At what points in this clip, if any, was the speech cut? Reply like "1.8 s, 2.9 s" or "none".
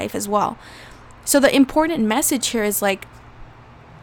none